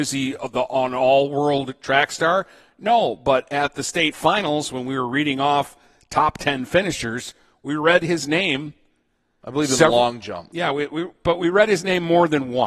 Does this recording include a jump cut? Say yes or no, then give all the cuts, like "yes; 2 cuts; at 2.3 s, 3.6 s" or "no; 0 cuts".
no; 0 cuts